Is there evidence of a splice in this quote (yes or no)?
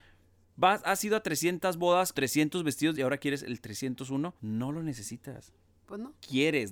yes